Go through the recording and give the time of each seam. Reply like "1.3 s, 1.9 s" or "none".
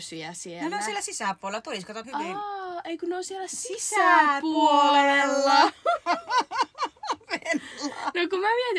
2.0 s